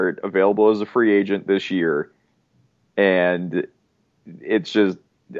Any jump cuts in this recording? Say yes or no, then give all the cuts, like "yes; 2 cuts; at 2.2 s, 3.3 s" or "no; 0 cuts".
no; 0 cuts